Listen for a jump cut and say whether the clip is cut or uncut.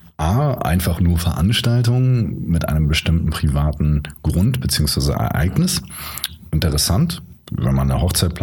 uncut